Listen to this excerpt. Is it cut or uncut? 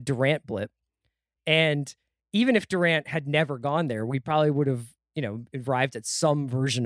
uncut